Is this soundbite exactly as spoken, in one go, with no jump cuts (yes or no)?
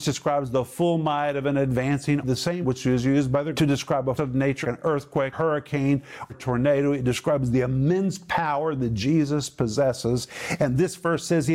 no